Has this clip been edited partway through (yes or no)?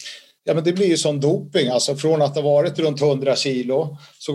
no